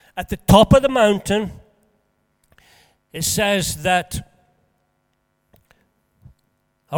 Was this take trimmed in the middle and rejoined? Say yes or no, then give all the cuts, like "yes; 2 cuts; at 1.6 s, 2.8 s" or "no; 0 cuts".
no; 0 cuts